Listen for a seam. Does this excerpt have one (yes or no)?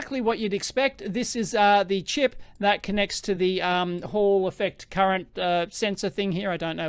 no